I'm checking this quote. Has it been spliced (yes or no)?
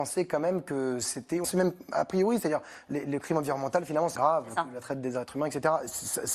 yes